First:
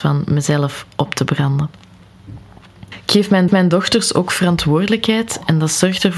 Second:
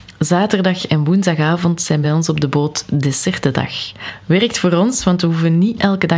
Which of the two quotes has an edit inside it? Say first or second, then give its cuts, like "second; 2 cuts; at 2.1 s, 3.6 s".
first; 1 cut; at 3.5 s